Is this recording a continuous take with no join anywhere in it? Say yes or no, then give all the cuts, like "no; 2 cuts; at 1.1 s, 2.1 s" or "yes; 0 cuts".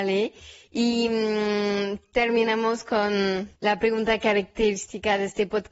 no; 1 cut; at 3.6 s